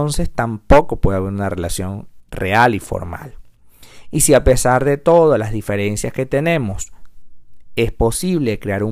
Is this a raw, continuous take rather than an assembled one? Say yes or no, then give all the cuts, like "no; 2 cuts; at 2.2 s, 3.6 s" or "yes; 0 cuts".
yes; 0 cuts